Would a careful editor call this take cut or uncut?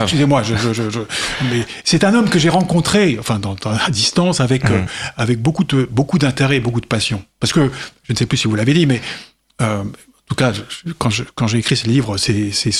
uncut